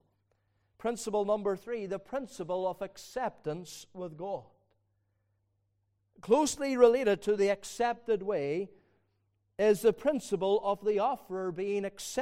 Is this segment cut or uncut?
uncut